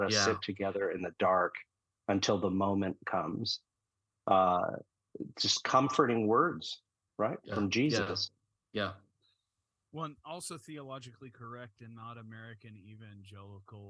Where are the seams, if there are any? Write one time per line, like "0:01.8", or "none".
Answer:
none